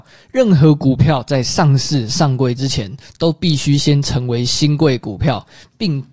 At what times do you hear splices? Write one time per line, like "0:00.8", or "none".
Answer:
none